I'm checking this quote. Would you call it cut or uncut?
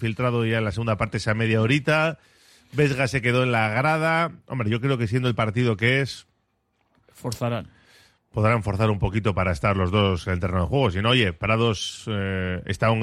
uncut